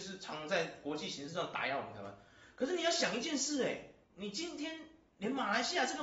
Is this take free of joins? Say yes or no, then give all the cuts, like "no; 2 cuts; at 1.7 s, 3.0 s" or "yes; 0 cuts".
yes; 0 cuts